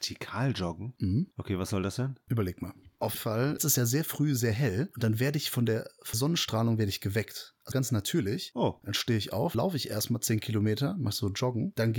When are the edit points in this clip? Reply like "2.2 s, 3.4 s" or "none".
3.1 s, 6.1 s, 7.7 s, 9.5 s